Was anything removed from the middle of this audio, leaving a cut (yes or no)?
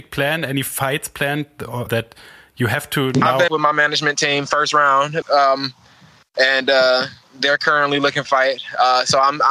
yes